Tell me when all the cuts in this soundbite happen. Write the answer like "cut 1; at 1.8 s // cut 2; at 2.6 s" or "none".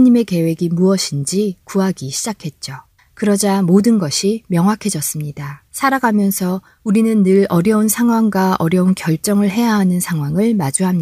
cut 1; at 3.0 s // cut 2; at 5.7 s